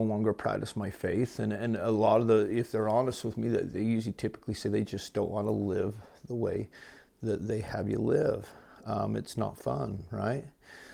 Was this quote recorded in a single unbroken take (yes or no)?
yes